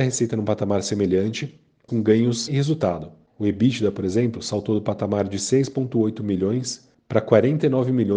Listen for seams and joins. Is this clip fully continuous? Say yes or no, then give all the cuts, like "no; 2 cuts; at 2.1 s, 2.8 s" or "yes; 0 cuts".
no; 2 cuts; at 1.9 s, 2.5 s